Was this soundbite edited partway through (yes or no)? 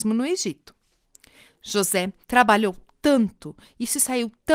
yes